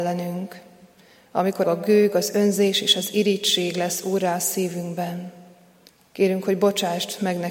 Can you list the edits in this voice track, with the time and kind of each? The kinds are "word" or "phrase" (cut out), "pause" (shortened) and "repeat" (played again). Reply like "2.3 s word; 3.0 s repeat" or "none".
1.6 s phrase; 5.9 s pause